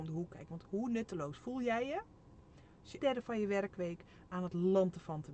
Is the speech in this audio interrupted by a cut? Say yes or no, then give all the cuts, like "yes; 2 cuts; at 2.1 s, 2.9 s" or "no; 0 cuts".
yes; 1 cut; at 3.0 s